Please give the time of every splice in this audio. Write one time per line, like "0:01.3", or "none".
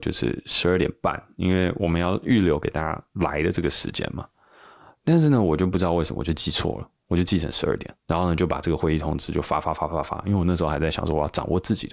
0:08.0